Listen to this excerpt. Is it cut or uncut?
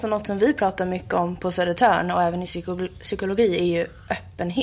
uncut